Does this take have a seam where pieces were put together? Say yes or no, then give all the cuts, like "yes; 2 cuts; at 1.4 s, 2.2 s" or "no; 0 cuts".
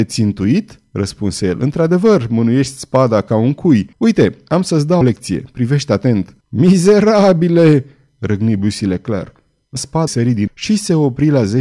yes; 6 cuts; at 3.9 s, 5.0 s, 6.4 s, 9.8 s, 10.1 s, 10.5 s